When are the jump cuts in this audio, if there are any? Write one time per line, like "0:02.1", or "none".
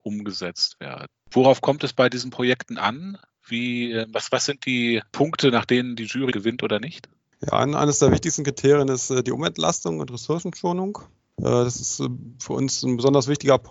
0:06.3